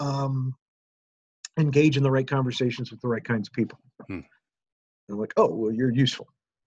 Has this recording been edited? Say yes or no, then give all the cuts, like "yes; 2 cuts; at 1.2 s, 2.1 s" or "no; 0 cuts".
no; 0 cuts